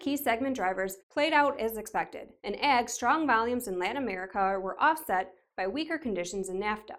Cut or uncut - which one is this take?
cut